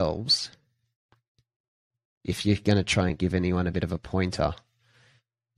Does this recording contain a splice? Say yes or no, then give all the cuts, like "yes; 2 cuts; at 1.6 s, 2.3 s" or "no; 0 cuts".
no; 0 cuts